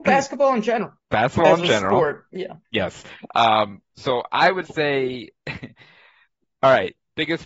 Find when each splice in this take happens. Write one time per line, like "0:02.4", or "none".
0:01.0
0:02.6